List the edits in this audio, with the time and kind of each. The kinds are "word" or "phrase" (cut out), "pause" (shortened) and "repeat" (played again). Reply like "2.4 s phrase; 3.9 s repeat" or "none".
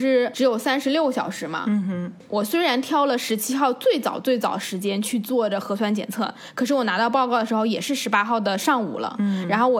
none